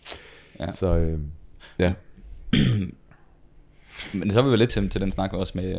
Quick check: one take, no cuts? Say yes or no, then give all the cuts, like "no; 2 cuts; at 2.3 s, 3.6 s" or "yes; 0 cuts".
no; 1 cut; at 4.7 s